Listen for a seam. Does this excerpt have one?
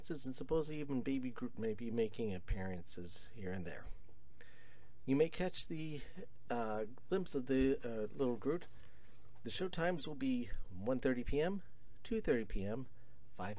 no; 0 cuts

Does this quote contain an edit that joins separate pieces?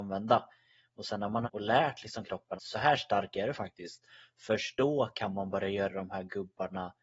yes; 2 cuts; at 1.4 s, 2.6 s

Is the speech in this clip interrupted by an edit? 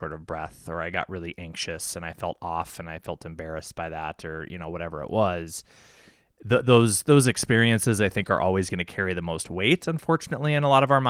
no; 0 cuts

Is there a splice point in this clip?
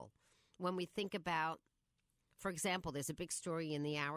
no; 0 cuts

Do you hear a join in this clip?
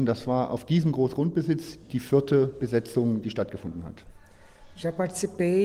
no; 0 cuts

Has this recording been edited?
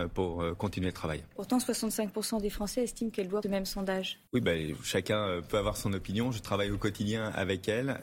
yes; 2 cuts; at 3.4 s, 4.3 s

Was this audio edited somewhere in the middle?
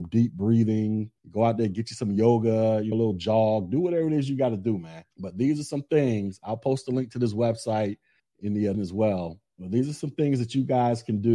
yes; 5 cuts; at 1.2 s, 2.9 s, 5.1 s, 8.2 s, 8.7 s

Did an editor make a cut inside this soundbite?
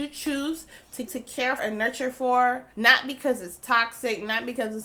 yes; 3 cuts; at 1.1 s, 1.6 s, 2.7 s

